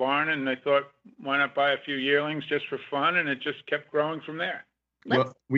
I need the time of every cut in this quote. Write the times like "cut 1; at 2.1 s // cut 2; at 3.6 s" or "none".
none